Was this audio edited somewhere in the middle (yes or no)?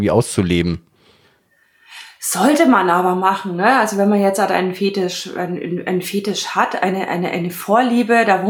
no